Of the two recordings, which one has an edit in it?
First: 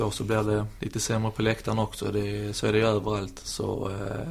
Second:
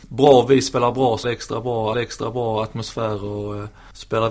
second; 2 cuts; at 1.2 s, 1.9 s

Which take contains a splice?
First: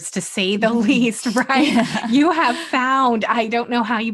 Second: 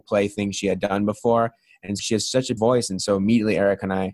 second; 2 cuts; at 2.0 s, 2.6 s

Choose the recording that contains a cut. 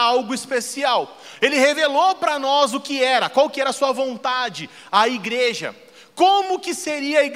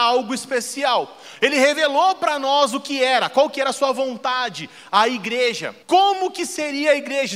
second; 1 cut; at 5.8 s

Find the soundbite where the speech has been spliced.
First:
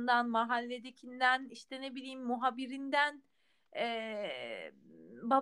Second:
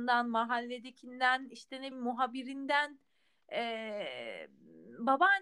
second; 1 cut; at 1.9 s

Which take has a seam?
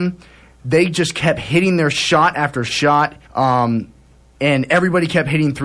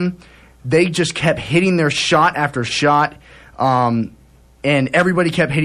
first; 1 cut; at 3.2 s

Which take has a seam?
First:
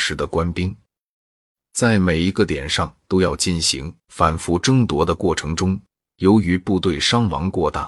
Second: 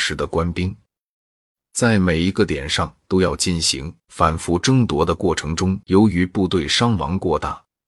second; 1 cut; at 5.8 s

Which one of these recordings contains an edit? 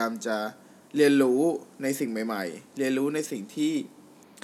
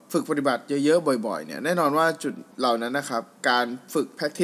second; 1 cut; at 2.5 s

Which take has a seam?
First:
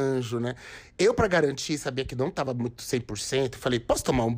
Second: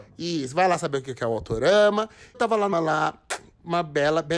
second; 2 cuts; at 2.3 s, 2.7 s

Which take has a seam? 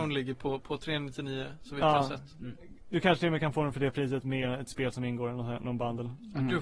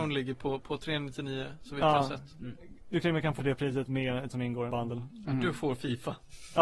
second; 4 cuts; at 3.0 s, 3.4 s, 4.3 s, 4.7 s

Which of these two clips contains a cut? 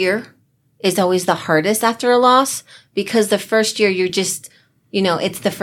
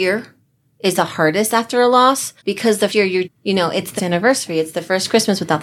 second; 5 cuts; at 1.0 s, 2.4 s, 2.9 s, 3.2 s, 4.0 s

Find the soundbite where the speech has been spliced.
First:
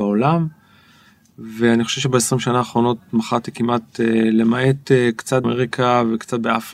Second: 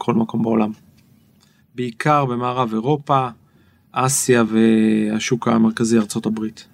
first; 1 cut; at 5.4 s

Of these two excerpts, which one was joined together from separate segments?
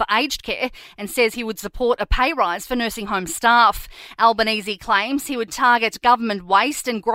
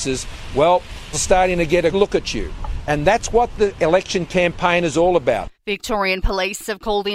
second; 3 cuts; at 1.1 s, 1.9 s, 5.5 s

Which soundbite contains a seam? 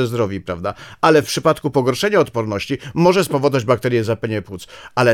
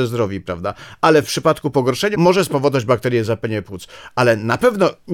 second; 1 cut; at 2.1 s

